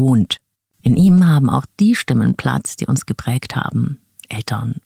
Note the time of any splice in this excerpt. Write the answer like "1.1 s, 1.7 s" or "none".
none